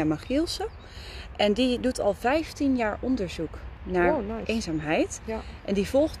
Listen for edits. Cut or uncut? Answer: uncut